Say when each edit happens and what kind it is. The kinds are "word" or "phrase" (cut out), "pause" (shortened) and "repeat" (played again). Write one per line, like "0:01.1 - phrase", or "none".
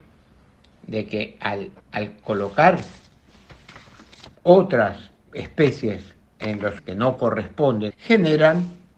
0:01.8 - pause
0:05.3 - word
0:06.8 - word
0:07.9 - phrase